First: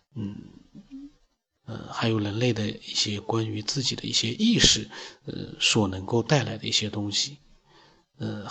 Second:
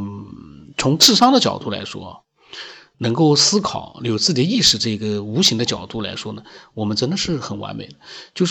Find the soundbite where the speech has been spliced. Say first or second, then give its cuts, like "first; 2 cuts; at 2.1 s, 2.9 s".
first; 1 cut; at 1.6 s